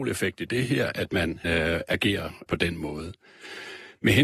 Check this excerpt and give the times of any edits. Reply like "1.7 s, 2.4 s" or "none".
1.4 s, 2.5 s

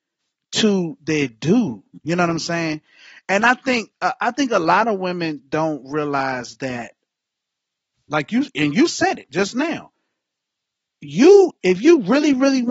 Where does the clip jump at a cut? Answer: none

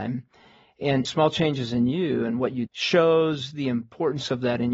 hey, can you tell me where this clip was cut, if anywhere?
1.0 s, 2.7 s

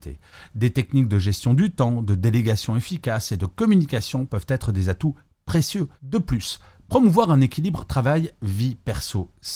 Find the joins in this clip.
6.0 s

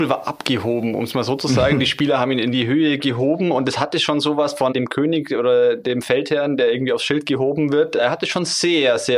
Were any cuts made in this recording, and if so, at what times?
none

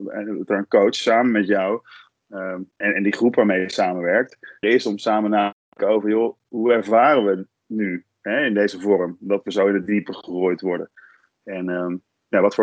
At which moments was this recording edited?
2.8 s, 4.6 s, 7.5 s

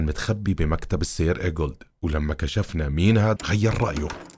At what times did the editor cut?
3.4 s

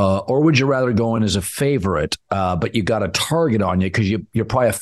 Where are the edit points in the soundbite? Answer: none

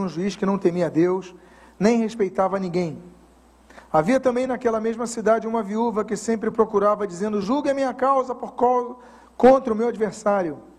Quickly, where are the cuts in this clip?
none

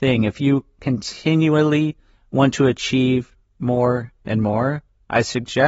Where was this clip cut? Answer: none

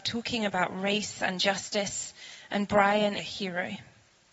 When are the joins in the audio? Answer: 3.2 s

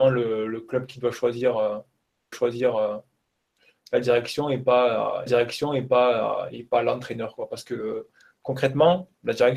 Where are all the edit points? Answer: 2.3 s, 5.3 s

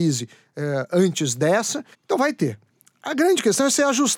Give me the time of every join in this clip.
1.9 s

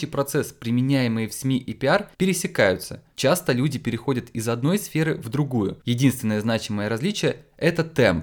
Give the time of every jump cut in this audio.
2.1 s

